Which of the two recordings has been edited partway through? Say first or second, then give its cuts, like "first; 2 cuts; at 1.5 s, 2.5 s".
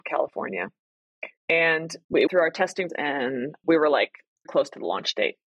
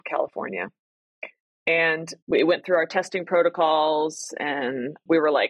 first; 4 cuts; at 1.4 s, 2.3 s, 2.9 s, 4.4 s